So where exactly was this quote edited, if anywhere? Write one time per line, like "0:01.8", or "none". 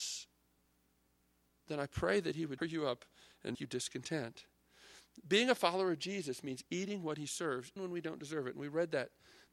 0:02.6
0:03.5
0:07.8